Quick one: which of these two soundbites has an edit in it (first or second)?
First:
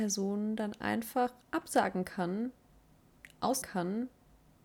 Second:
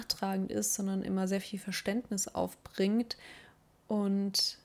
first